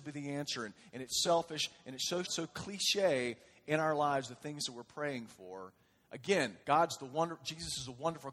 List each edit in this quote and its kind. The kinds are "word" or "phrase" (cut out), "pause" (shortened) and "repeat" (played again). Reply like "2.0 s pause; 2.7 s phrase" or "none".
1.2 s word; 2.2 s word; 6.6 s pause